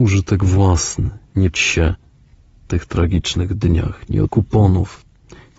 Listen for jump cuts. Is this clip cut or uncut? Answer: cut